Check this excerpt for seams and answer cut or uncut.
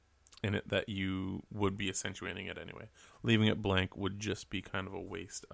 uncut